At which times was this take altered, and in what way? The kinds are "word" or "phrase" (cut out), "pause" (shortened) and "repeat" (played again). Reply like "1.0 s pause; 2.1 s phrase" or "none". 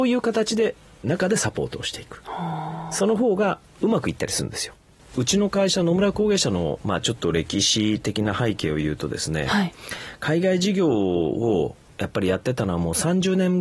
5.0 s pause

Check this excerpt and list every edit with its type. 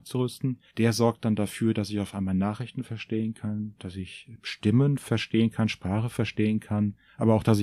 none

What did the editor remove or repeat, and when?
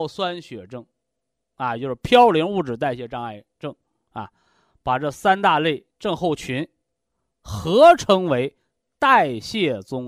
5.9 s pause

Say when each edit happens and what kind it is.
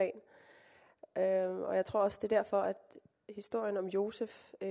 none

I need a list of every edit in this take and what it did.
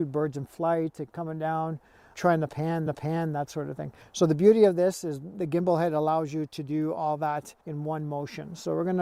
2.1 s word; 2.9 s repeat; 7.6 s pause

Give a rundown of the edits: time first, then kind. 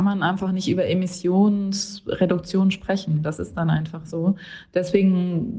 none

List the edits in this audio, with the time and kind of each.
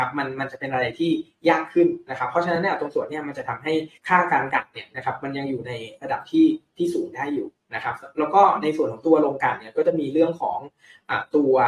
4.0 s pause

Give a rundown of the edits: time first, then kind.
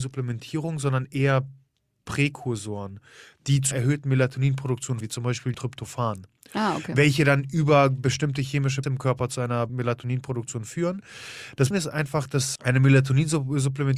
3.7 s word; 5.0 s word; 5.5 s word; 8.8 s word; 9.7 s word; 11.7 s word; 12.6 s word

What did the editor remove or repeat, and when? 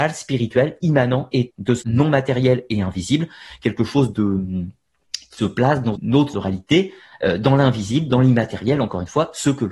1.5 s word; 1.8 s word; 4.1 s word; 5.4 s word; 6.0 s word; 6.3 s word

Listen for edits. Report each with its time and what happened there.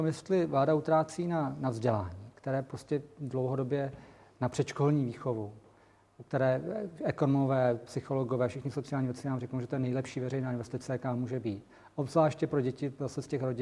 none

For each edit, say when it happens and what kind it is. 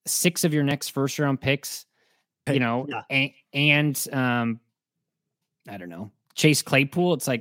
2.5 s word

